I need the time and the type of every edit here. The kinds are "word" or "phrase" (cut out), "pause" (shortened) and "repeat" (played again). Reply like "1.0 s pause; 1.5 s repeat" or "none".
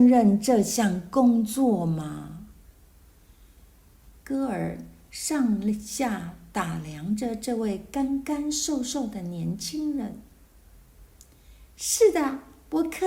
none